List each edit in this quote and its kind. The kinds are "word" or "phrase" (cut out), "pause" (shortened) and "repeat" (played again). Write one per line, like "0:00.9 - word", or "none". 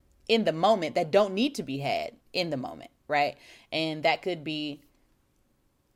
0:02.2 - pause